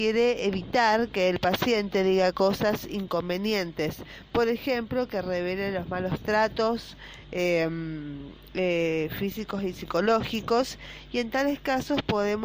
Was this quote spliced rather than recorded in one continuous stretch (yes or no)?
no